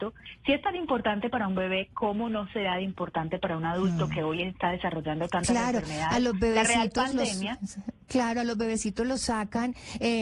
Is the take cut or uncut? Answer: uncut